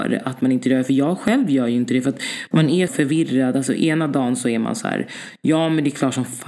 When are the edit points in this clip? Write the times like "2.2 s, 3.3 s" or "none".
2.9 s